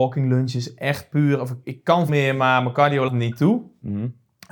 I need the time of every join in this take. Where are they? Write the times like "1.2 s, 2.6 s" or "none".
1.6 s, 2.1 s, 3.1 s